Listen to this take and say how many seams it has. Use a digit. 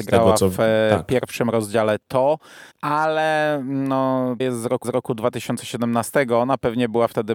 3